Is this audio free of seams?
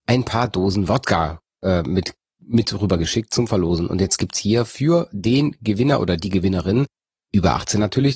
yes; 0 cuts

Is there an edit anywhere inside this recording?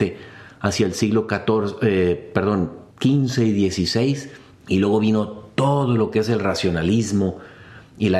yes; 2 cuts; at 2.9 s, 4.5 s

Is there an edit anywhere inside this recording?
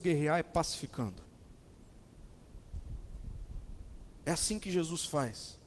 no; 0 cuts

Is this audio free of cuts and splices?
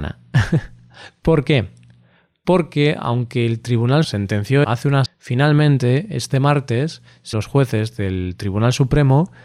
no; 4 cuts; at 4.0 s, 4.6 s, 5.1 s, 7.3 s

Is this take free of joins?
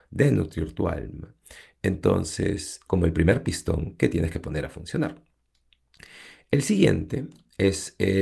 no; 1 cut; at 2.9 s

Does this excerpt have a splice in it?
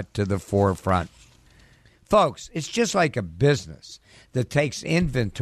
no; 0 cuts

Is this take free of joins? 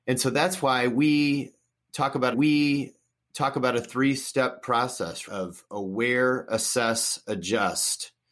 no; 2 cuts; at 2.3 s, 5.3 s

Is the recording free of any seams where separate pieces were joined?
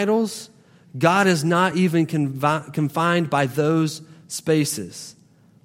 yes; 0 cuts

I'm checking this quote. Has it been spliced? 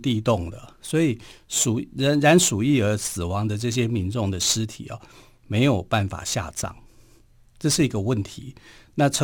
no; 0 cuts

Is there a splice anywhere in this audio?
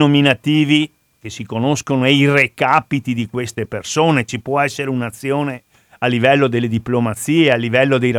no; 0 cuts

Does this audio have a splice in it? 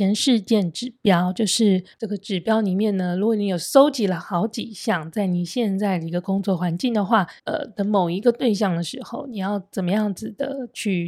yes; 2 cuts; at 1.9 s, 7.4 s

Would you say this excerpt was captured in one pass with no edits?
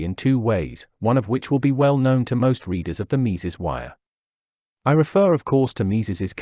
yes; 0 cuts

